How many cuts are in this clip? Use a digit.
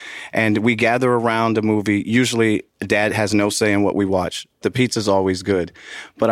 2